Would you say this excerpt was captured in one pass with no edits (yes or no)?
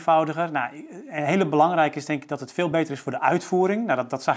yes